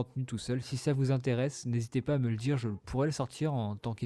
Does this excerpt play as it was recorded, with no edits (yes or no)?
yes